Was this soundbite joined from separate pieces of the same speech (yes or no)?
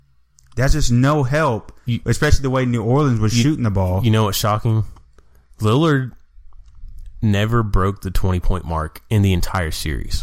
no